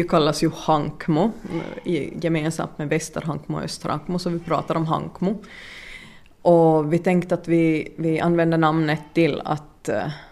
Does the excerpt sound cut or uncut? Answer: uncut